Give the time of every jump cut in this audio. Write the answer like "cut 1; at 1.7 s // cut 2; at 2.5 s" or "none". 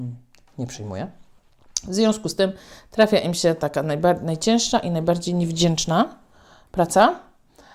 none